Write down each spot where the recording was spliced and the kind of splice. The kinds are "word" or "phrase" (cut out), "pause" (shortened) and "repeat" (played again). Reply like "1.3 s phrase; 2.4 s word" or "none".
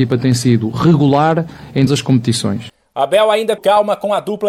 1.9 s word; 3.6 s word